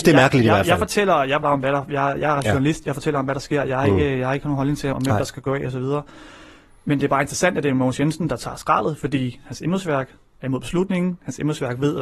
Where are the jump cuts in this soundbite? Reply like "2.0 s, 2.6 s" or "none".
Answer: 1.4 s, 4.9 s